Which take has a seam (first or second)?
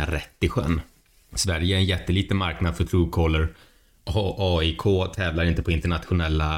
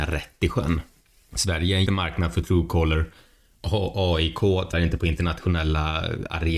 second